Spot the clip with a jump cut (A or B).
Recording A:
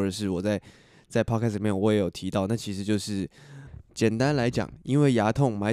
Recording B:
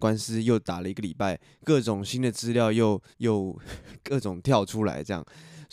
B